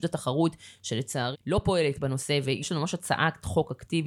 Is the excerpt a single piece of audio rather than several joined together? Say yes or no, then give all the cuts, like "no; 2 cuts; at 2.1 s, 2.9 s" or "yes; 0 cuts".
no; 2 cuts; at 1.3 s, 2.0 s